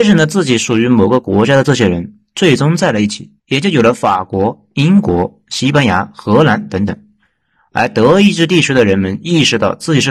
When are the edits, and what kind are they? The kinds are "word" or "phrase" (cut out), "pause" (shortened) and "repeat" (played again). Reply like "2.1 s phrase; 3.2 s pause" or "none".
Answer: 3.4 s pause